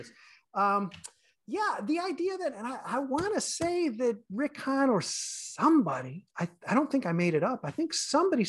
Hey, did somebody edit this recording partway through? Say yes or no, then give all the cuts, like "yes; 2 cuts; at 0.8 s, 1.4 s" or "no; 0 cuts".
no; 0 cuts